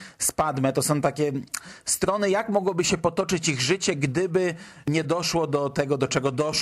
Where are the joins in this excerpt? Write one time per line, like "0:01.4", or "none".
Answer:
none